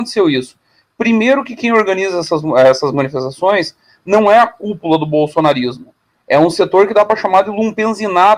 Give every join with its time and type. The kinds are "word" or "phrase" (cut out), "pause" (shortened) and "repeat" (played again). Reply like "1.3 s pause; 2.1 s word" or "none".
none